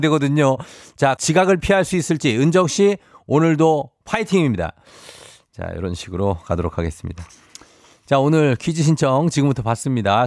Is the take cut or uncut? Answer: cut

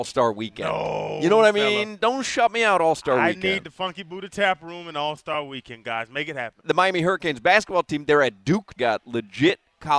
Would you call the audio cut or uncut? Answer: cut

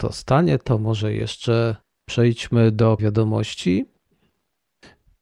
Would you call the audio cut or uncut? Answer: cut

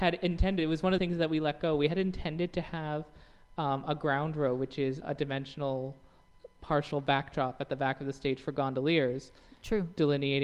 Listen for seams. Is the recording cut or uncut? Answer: cut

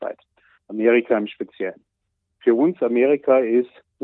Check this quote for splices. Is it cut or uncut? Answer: uncut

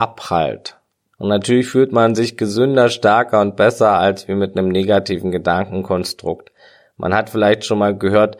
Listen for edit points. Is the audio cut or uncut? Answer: uncut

